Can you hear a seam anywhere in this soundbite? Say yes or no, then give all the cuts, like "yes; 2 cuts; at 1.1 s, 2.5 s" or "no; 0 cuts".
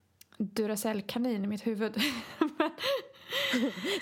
no; 0 cuts